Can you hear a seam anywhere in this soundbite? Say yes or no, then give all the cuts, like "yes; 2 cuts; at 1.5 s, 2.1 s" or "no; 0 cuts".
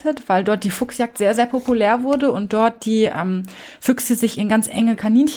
no; 0 cuts